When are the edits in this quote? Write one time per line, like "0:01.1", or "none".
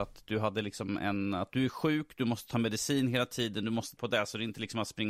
0:04.0

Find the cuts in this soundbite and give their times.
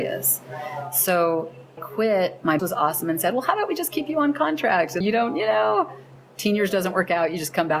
0:01.8
0:02.6
0:05.0

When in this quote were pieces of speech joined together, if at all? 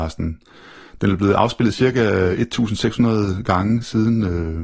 none

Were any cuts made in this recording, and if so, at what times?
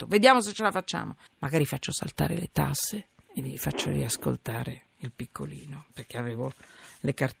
0:01.3
0:04.9

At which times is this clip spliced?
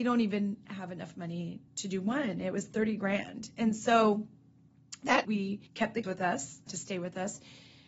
0:01.7
0:05.2
0:05.7
0:06.0
0:06.7

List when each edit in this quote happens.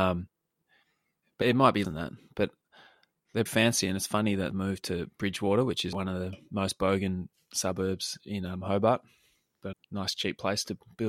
0:01.4
0:01.8
0:03.5
0:04.5
0:05.9
0:09.7

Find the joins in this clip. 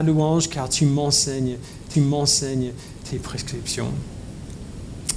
0:01.9

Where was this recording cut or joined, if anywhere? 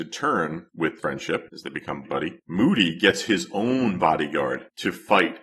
0:01.0
0:02.0
0:02.4

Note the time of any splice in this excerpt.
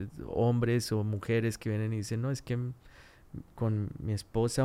none

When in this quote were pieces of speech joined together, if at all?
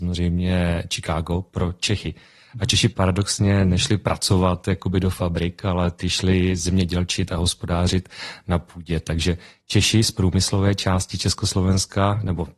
none

